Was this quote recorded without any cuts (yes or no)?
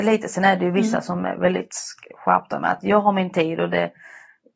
yes